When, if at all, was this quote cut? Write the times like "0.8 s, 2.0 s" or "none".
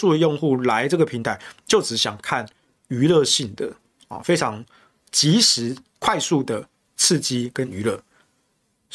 none